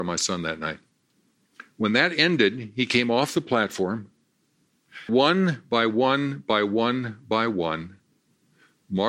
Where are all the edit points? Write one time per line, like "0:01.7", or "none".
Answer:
0:05.1